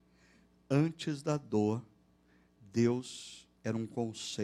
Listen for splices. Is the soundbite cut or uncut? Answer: cut